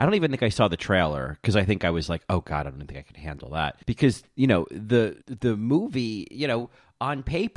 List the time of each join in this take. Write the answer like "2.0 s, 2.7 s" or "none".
3.8 s, 5.2 s